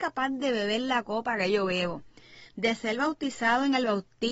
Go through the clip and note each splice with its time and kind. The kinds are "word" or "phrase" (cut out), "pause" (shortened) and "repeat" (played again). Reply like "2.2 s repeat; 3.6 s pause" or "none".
none